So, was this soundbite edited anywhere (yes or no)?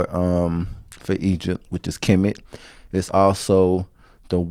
no